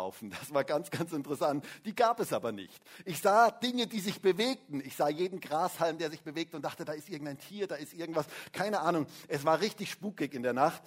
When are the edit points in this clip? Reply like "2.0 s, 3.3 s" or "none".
none